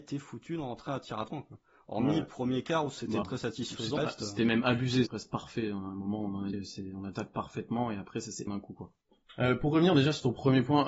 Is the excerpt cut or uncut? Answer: cut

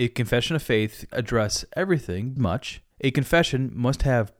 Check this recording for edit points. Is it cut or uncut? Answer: cut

